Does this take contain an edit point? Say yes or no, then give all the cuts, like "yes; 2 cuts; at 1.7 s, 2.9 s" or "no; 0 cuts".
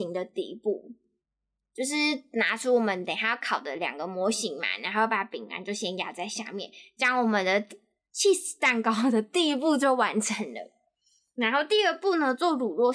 no; 0 cuts